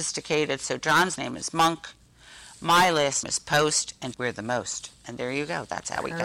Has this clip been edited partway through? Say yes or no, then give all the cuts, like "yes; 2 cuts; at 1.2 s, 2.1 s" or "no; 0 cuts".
yes; 3 cuts; at 1.2 s, 3.2 s, 4.1 s